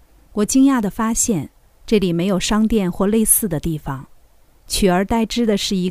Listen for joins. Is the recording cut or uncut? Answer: uncut